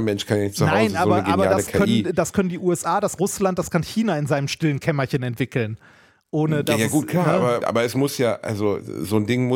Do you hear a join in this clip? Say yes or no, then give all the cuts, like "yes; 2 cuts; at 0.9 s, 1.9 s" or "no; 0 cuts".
yes; 2 cuts; at 3.2 s, 7.6 s